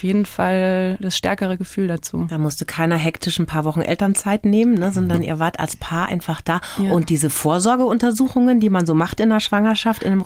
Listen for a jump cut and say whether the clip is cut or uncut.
uncut